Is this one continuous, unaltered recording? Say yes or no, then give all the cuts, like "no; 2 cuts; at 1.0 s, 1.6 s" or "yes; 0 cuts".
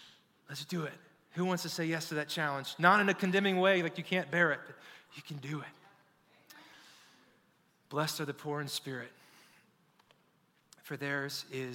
yes; 0 cuts